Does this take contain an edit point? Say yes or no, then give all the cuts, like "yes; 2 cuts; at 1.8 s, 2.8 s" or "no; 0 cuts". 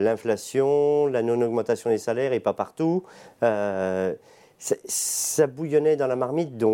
no; 0 cuts